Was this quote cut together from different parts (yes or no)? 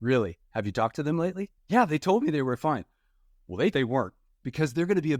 yes